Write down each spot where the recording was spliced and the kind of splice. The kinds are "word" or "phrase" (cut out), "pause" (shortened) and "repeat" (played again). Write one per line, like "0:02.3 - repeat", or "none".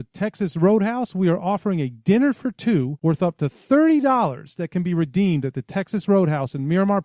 none

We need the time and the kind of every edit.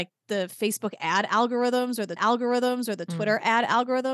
0:02.2 - repeat

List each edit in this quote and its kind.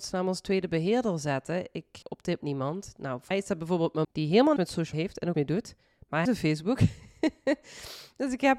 0:02.0 - word
0:02.4 - word
0:03.3 - word
0:04.0 - word
0:04.6 - word
0:04.9 - word
0:05.3 - word
0:06.3 - word

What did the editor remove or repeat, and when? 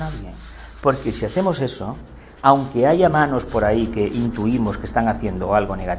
none

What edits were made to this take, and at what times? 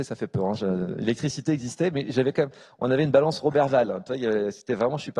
none

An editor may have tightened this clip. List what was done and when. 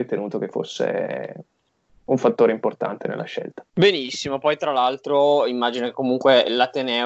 none

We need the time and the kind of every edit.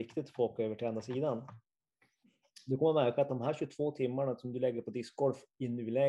none

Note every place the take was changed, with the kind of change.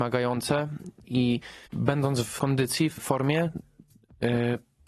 0:01.0 - word
0:01.7 - pause
0:02.4 - word
0:03.0 - word

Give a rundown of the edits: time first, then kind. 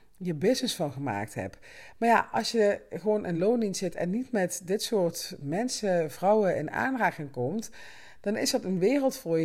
none

